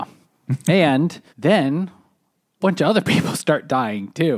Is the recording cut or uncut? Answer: cut